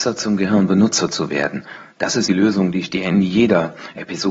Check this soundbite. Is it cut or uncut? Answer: cut